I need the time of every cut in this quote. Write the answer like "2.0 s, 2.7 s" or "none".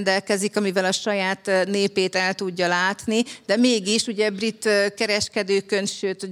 none